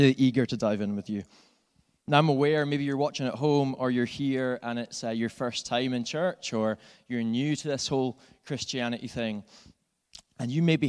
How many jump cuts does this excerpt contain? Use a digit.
0